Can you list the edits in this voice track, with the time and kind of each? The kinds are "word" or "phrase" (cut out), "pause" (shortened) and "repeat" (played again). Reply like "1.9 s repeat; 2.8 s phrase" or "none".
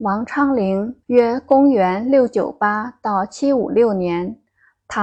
1.0 s pause